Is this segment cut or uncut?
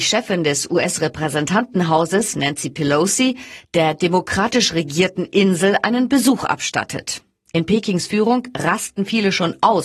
uncut